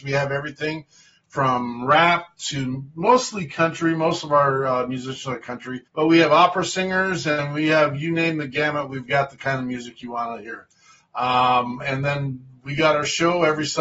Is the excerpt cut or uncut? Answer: cut